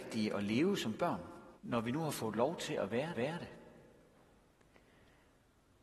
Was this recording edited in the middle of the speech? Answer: yes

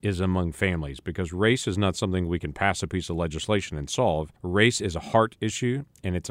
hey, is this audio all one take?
no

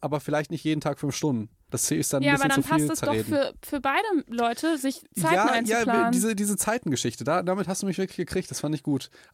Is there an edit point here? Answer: no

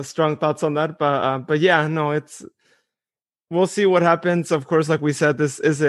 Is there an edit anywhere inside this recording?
no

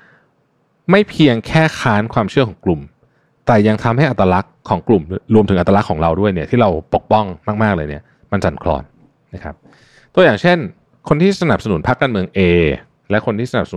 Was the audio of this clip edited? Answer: no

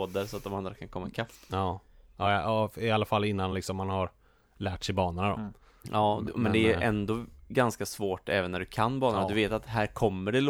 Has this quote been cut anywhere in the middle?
no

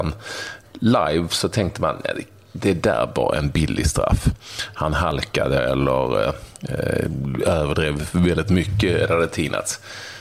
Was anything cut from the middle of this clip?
no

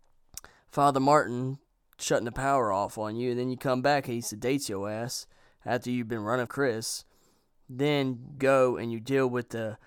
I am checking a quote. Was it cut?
yes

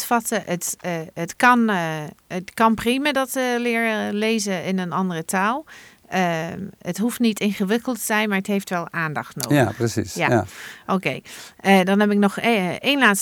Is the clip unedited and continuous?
yes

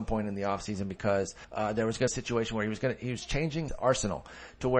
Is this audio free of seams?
no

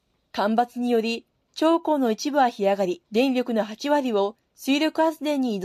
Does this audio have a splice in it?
yes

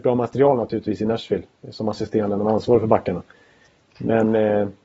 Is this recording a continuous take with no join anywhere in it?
yes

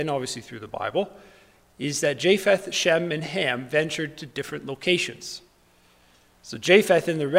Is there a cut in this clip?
no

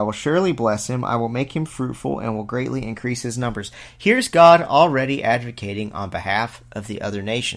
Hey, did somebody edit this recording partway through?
no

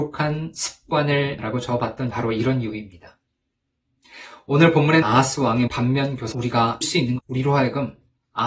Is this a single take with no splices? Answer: no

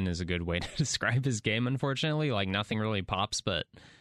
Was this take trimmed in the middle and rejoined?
no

